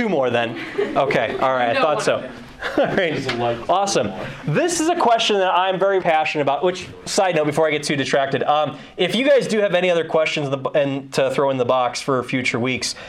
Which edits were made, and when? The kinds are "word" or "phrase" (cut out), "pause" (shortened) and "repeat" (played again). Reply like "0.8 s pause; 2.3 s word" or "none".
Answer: 6.0 s word

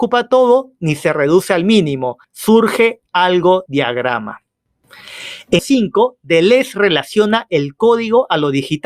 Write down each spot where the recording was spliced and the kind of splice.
2.2 s pause; 3.7 s word; 5.6 s phrase

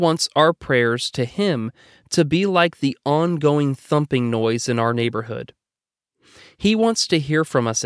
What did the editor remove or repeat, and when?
none

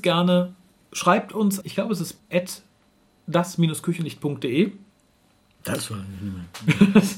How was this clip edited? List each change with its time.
1.6 s word; 2.2 s word

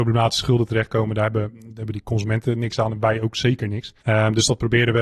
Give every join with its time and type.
4.0 s pause

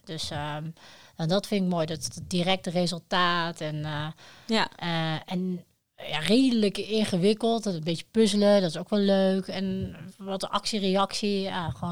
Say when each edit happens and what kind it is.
none

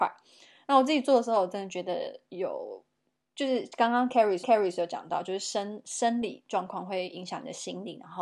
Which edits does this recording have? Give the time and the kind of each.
4.4 s repeat

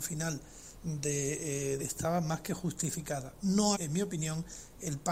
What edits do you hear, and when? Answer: 1.8 s phrase; 3.7 s word

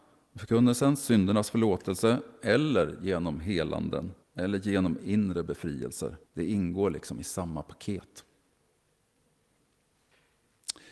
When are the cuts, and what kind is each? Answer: 4.2 s pause; 6.2 s pause

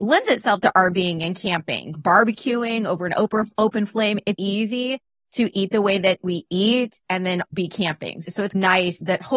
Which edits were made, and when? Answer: 1.9 s word; 4.3 s word; 7.4 s word

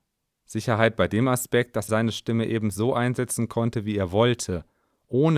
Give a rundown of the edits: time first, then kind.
1.9 s word

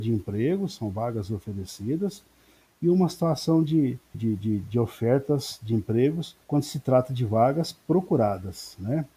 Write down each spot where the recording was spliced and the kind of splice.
4.1 s word; 6.4 s pause

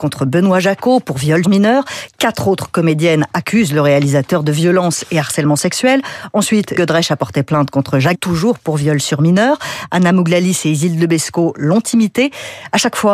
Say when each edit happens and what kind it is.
1.4 s word; 6.7 s word; 8.1 s word

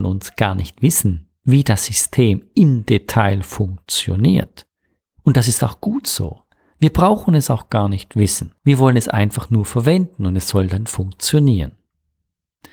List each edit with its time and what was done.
8.6 s pause

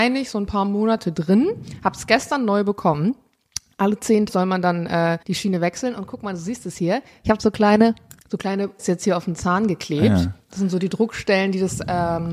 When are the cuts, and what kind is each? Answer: 4.3 s word; 5.2 s pause; 8.2 s pause; 8.8 s word

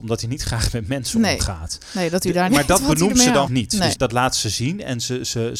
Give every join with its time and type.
2.5 s word; 3.5 s word; 3.9 s word

